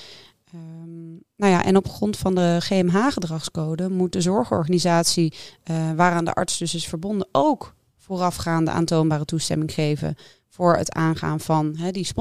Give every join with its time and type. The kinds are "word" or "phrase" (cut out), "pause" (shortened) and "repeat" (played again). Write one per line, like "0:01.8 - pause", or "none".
none